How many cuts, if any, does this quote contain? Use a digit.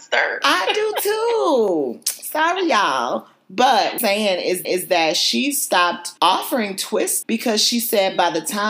4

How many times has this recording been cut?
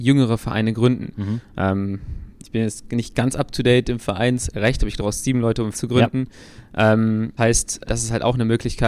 4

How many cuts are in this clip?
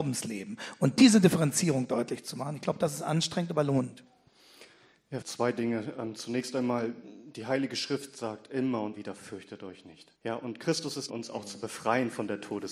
4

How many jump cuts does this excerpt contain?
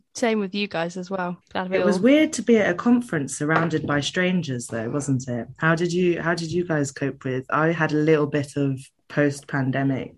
1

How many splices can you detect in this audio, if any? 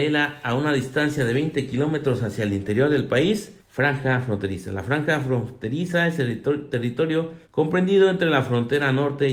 2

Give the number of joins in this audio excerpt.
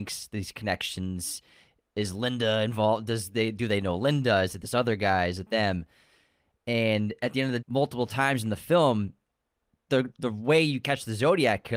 2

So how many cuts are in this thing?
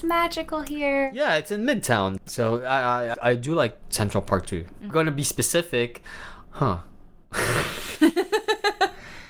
3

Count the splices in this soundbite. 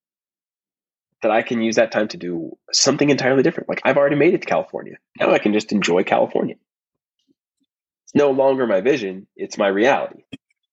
1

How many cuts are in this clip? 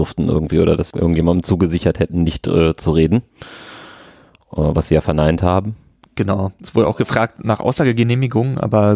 0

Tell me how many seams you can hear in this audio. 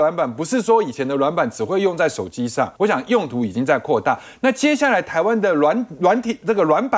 1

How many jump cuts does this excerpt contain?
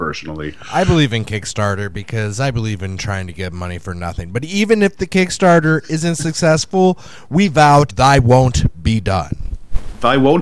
1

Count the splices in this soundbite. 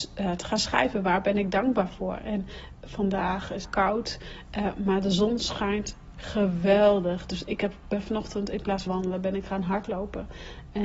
3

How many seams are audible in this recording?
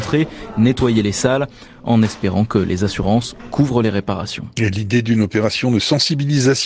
0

